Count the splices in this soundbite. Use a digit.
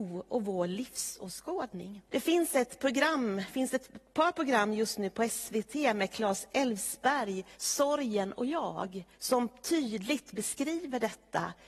3